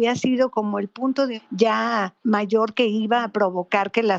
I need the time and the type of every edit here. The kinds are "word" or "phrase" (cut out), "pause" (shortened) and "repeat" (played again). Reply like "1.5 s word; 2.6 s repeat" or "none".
1.4 s word; 2.2 s word